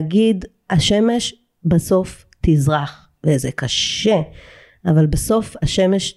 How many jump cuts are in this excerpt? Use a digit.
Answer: 0